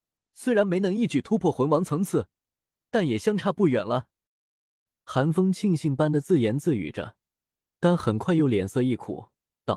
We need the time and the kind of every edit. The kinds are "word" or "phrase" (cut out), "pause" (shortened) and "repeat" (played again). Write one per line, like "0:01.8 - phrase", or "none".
none